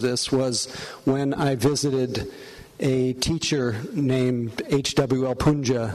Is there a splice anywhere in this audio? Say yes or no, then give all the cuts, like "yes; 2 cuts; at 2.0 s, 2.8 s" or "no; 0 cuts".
no; 0 cuts